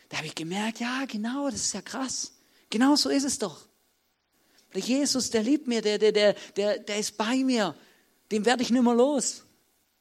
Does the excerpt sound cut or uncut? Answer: cut